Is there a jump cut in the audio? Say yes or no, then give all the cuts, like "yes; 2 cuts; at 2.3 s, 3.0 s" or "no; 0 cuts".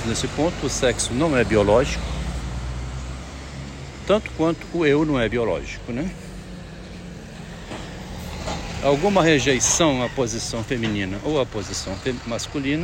no; 0 cuts